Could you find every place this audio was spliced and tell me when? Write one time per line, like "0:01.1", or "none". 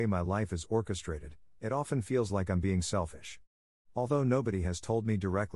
none